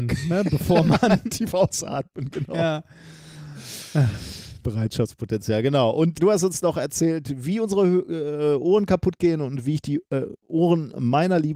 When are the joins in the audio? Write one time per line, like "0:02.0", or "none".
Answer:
0:06.2